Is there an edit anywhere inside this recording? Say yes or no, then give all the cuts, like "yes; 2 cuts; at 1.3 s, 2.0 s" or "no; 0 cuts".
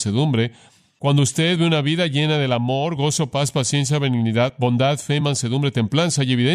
no; 0 cuts